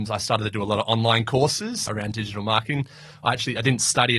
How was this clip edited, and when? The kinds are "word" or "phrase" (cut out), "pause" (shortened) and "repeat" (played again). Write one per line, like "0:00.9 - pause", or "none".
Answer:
0:01.9 - word

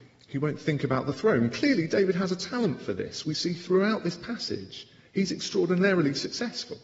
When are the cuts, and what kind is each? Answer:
none

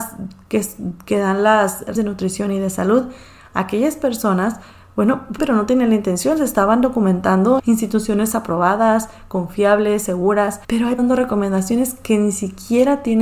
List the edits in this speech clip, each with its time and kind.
0:02.0 - word
0:05.4 - phrase
0:07.6 - word
0:10.6 - pause
0:11.0 - phrase

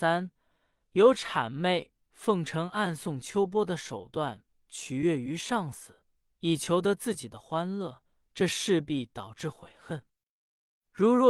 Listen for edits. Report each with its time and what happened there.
none

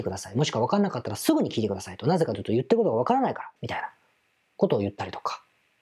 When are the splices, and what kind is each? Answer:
0:03.6 - pause

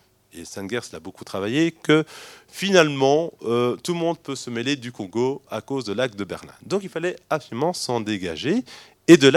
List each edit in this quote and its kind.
none

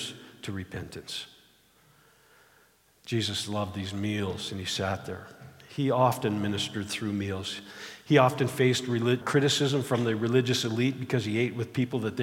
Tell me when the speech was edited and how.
0:09.2 - word

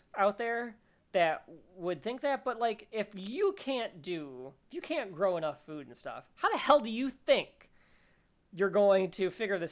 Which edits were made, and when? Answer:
0:04.6 - pause

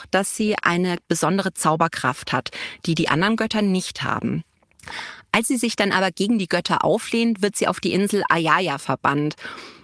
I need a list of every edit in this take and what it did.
none

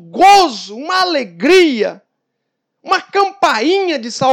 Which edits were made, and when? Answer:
none

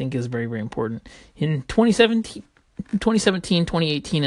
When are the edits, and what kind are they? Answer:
none

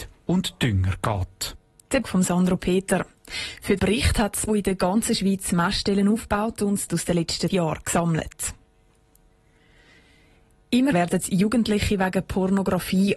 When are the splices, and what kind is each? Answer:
0:02.0 - word
0:03.8 - word
0:04.5 - word
0:06.9 - word
0:07.5 - word
0:10.9 - word

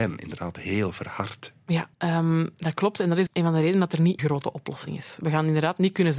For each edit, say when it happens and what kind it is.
0:01.9 - pause
0:03.3 - word
0:04.2 - word

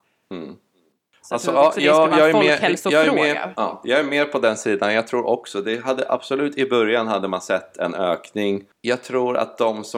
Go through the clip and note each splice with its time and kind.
none

